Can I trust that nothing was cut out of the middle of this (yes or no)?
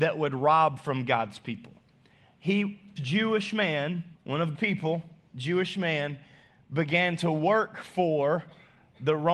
no